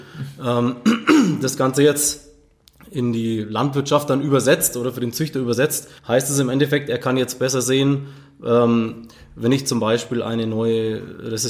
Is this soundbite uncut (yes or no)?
no